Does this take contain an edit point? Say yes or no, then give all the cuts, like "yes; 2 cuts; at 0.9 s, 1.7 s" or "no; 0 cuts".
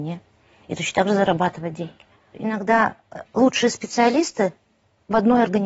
yes; 1 cut; at 3.3 s